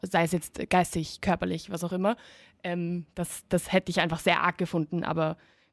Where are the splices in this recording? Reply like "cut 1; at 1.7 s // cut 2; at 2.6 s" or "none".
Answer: none